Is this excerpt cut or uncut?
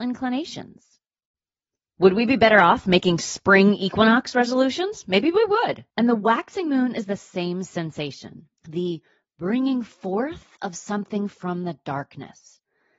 cut